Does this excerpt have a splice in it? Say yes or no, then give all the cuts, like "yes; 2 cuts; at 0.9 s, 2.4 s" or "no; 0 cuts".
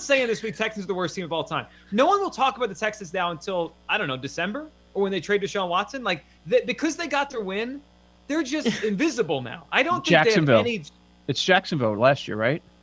no; 0 cuts